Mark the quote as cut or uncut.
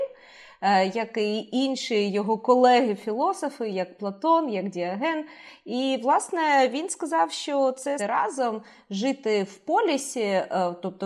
cut